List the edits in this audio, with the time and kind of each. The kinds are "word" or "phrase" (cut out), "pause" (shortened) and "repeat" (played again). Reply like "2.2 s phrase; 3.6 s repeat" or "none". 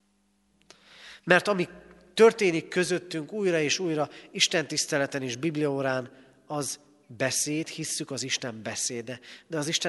none